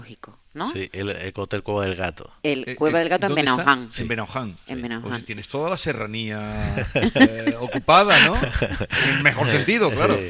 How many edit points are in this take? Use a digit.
0